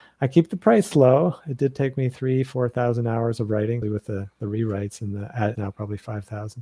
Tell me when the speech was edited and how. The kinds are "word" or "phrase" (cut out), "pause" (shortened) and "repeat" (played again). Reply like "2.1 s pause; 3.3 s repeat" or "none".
3.8 s word; 5.5 s word